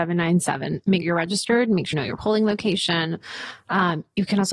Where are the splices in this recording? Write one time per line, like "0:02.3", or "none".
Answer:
0:01.0
0:01.9